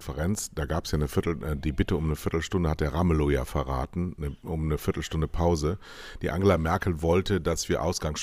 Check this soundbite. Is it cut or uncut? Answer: uncut